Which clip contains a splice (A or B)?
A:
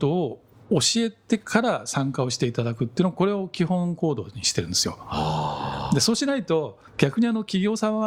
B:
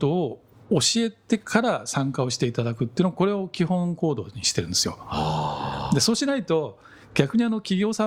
A